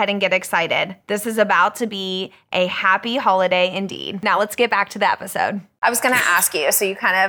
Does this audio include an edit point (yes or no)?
no